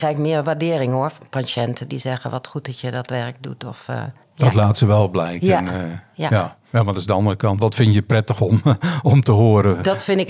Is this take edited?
yes; 1 cut; at 4.2 s

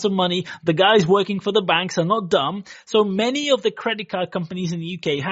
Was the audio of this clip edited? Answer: no; 0 cuts

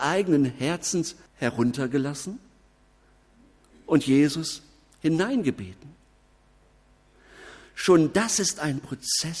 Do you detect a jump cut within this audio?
yes; 1 cut; at 1.3 s

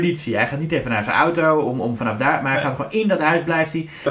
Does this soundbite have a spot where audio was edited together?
no; 0 cuts

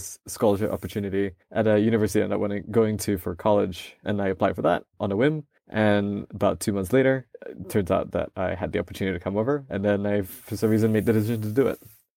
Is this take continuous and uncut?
no; 2 cuts; at 1.4 s, 5.6 s

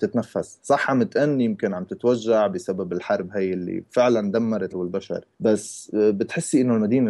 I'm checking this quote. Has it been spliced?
yes; 2 cuts; at 4.7 s, 5.3 s

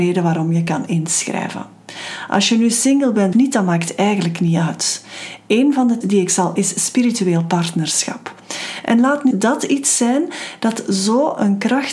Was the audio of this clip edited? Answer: yes; 4 cuts; at 3.3 s, 6.0 s, 6.6 s, 9.3 s

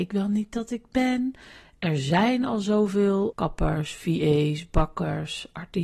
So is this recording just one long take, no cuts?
no; 1 cut; at 3.3 s

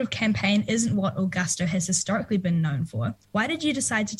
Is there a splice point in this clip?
yes; 1 cut; at 3.2 s

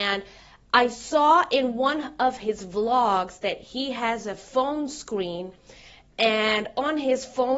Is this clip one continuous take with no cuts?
yes; 0 cuts

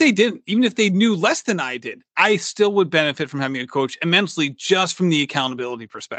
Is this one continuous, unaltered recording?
no; 1 cut; at 2.1 s

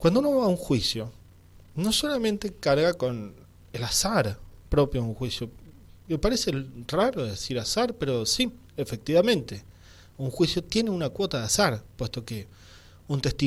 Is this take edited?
no; 0 cuts

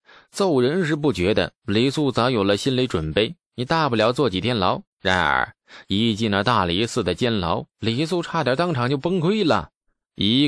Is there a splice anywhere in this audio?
yes; 1 cut; at 4.9 s

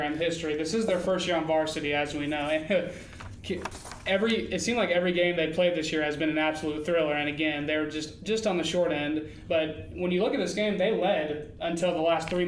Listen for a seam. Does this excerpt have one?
no; 0 cuts

